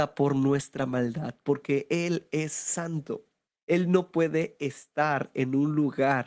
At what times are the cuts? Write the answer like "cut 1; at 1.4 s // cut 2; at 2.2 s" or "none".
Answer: cut 1; at 3.5 s